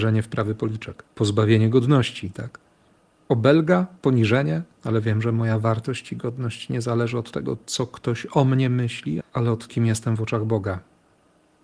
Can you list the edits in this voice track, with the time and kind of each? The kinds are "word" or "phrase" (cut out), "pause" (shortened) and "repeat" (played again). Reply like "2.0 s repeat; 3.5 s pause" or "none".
1.1 s pause; 4.7 s pause; 9.2 s word; 9.7 s word